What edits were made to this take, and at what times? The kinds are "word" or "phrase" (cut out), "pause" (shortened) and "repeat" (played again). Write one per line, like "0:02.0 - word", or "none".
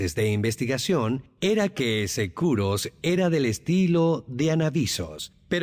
none

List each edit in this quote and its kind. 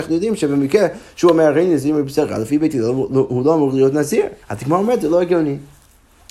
0:04.4 - pause

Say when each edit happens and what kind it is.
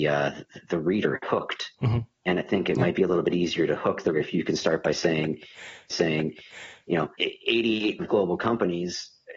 0:04.1 - word
0:05.9 - repeat
0:07.1 - pause
0:08.0 - word

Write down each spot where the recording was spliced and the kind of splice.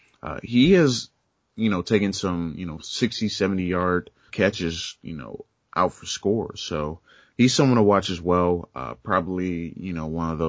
0:04.3 - word

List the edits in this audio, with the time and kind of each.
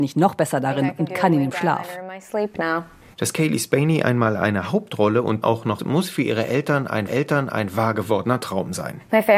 0:05.4 - word
0:05.8 - phrase
0:07.1 - repeat

